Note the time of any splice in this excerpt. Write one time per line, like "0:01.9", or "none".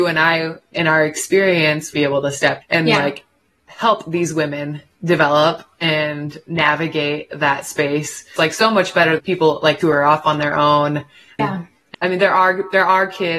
0:01.9
0:02.6
0:08.4
0:09.2
0:09.8
0:11.9